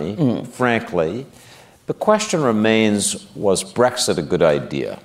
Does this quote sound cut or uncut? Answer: uncut